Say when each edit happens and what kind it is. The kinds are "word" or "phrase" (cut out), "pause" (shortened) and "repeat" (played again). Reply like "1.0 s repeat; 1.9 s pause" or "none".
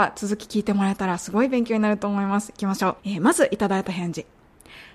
3.0 s pause